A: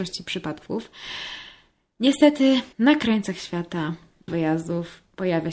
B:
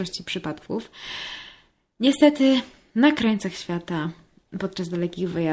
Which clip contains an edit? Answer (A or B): A